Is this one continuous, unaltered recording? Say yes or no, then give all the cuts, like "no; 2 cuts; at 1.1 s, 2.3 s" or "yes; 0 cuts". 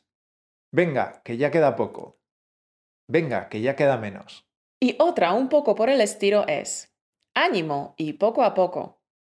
yes; 0 cuts